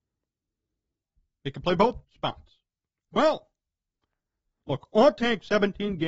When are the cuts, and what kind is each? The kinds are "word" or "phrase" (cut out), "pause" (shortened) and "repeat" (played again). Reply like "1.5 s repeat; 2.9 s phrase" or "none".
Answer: 2.0 s pause